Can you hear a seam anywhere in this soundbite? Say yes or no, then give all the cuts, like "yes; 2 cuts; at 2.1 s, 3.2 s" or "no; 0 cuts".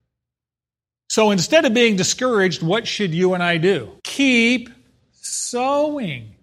yes; 1 cut; at 4.0 s